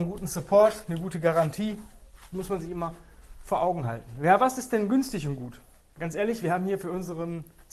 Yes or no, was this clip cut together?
no